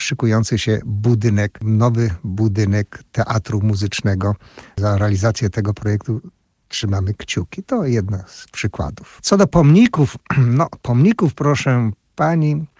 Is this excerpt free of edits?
yes; 0 cuts

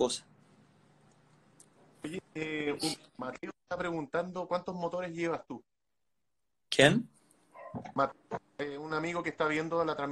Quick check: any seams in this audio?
no; 0 cuts

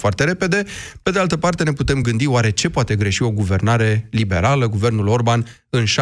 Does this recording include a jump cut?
no; 0 cuts

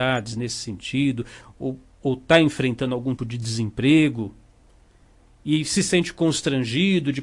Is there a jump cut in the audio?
yes; 1 cut; at 3.2 s

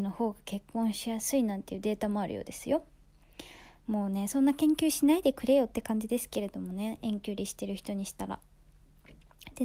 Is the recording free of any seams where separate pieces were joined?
yes; 0 cuts

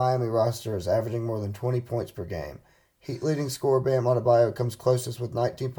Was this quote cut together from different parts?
no; 0 cuts

